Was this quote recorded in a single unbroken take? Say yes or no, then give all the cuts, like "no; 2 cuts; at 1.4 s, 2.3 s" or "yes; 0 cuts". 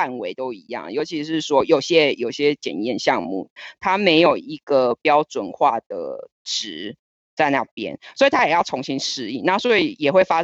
yes; 0 cuts